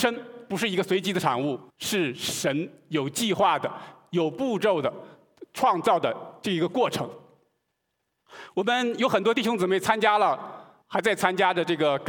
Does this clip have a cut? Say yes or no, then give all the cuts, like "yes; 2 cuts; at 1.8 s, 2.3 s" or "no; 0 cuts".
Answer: yes; 2 cuts; at 1.7 s, 10.8 s